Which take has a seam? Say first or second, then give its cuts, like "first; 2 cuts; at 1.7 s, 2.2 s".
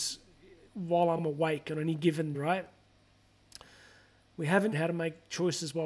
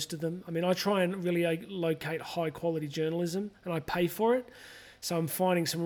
first; 3 cuts; at 1.2 s, 2.3 s, 4.7 s